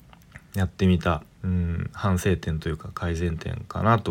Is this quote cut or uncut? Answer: cut